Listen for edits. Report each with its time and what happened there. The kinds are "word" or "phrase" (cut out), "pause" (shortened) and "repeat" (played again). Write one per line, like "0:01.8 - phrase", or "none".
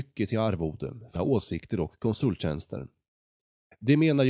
0:01.1 - word

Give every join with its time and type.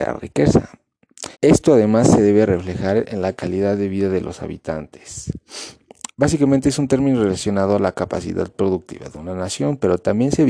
0:01.3 - pause
0:06.1 - pause

